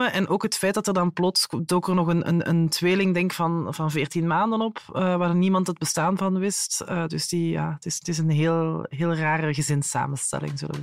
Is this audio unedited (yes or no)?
yes